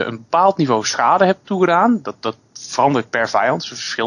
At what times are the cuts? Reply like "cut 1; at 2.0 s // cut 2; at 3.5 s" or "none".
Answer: none